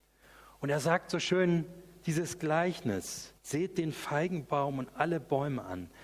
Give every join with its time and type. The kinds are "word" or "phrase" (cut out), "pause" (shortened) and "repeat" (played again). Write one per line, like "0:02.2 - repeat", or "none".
0:03.4 - pause